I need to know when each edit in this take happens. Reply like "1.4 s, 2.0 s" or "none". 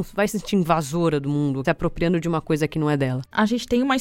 1.6 s